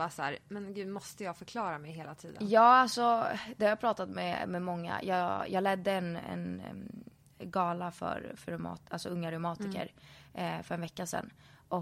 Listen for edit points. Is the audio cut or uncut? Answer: uncut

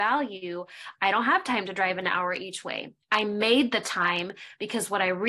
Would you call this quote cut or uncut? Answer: uncut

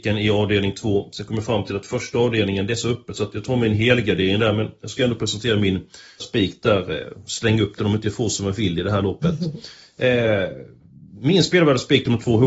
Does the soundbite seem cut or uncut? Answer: cut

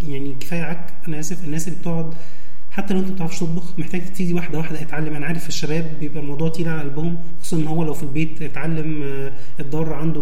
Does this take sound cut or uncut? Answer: uncut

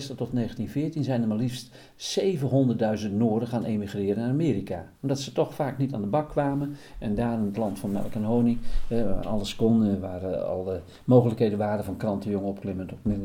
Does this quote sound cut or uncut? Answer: cut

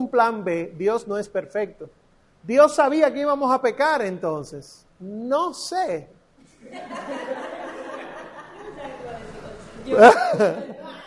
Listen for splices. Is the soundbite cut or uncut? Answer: cut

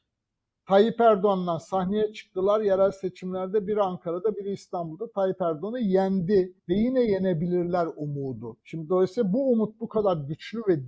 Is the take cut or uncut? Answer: cut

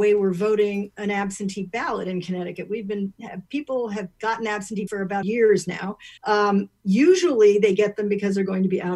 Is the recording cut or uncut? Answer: cut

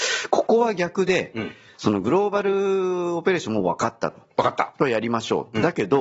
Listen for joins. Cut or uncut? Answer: uncut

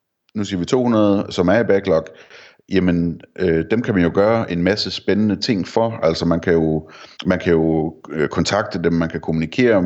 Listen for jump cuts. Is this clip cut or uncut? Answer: cut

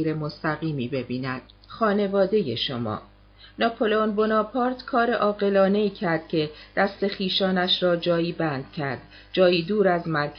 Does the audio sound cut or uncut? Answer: cut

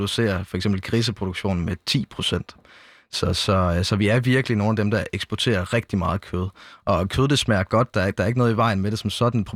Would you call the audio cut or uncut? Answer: uncut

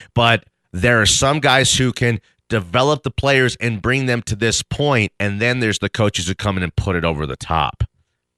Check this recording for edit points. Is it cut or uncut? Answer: uncut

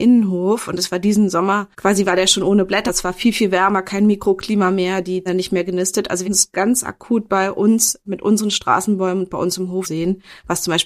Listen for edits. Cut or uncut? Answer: cut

